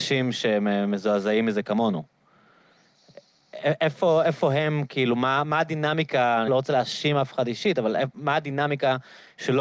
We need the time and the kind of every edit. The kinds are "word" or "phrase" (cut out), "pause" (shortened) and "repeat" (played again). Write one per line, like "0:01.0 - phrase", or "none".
0:06.5 - word